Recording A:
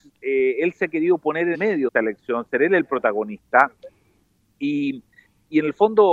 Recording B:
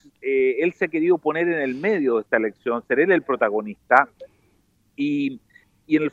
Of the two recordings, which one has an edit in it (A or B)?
A